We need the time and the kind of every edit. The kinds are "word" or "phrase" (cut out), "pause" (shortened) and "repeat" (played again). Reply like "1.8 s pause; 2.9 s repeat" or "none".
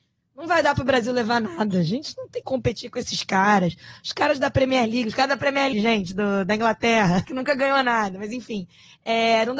2.4 s word; 5.7 s word; 7.2 s word